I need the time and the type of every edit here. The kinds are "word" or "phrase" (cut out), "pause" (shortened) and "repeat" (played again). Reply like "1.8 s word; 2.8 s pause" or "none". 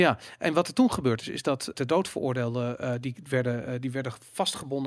1.7 s word

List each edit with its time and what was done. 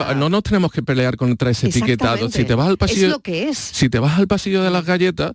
none

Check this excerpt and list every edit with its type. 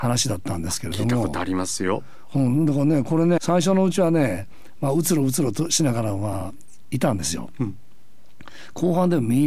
3.4 s word

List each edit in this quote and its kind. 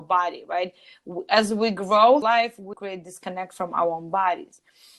2.2 s word; 2.7 s phrase

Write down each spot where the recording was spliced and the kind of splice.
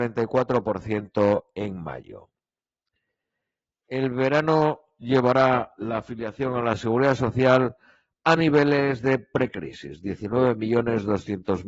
none

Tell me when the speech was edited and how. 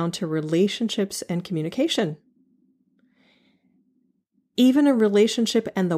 none

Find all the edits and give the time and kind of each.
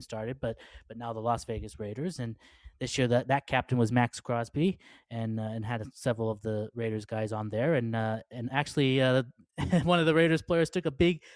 none

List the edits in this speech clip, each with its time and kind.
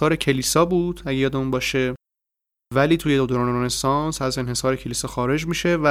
none

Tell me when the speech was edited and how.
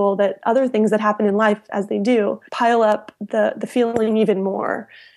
2.5 s pause

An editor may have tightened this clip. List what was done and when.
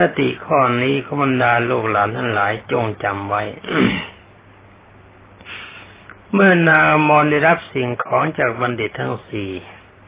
none

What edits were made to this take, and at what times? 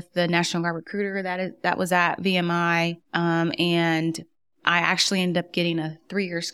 3.0 s pause

